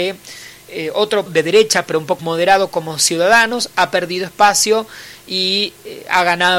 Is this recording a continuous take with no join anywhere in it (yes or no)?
no